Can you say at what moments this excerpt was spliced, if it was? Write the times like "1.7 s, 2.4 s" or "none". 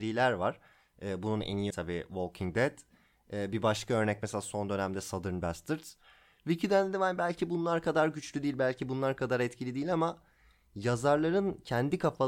1.7 s